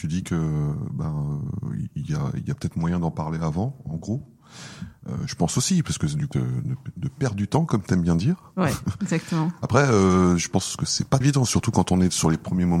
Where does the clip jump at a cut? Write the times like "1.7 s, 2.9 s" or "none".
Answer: 6.3 s, 11.2 s